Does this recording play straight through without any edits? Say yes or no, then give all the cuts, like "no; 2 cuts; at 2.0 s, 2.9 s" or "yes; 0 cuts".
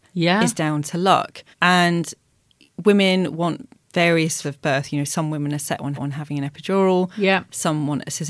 no; 3 cuts; at 1.5 s, 4.4 s, 5.9 s